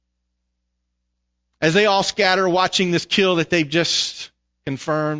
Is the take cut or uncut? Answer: uncut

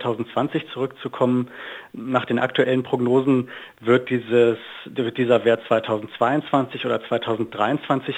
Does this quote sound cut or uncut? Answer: uncut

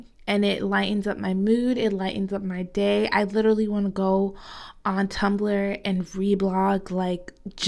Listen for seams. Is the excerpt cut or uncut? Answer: uncut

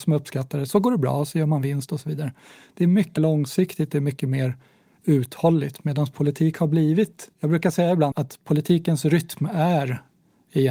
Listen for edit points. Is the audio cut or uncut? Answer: cut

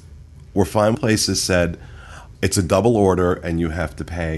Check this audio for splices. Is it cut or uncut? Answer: cut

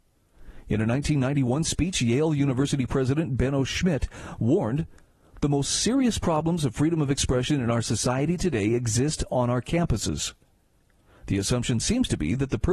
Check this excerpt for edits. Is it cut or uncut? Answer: uncut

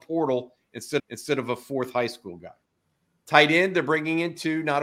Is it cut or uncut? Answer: cut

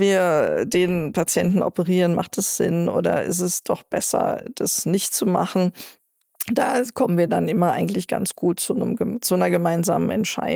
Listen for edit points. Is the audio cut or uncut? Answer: uncut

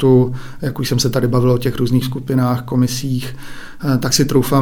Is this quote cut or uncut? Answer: cut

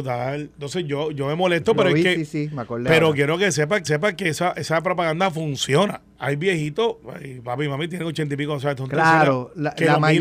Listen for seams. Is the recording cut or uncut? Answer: cut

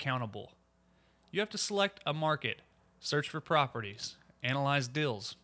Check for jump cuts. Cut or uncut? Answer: uncut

